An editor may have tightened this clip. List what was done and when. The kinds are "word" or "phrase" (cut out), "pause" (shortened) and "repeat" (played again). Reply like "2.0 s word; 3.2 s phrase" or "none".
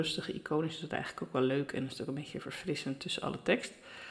none